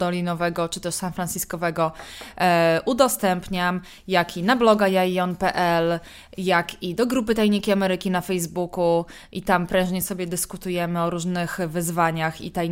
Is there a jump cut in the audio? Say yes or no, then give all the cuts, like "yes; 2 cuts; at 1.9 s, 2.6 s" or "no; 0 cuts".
no; 0 cuts